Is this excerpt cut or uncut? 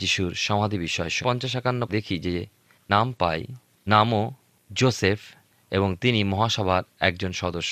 cut